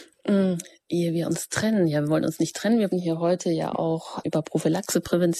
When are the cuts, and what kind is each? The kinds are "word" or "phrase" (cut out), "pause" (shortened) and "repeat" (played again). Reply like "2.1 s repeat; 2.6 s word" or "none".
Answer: 2.9 s word; 4.2 s word